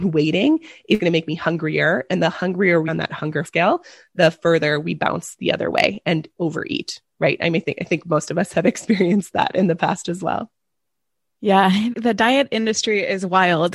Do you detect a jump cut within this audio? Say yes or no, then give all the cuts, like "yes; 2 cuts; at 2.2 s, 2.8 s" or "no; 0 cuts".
yes; 4 cuts; at 1.0 s, 2.9 s, 3.5 s, 11.9 s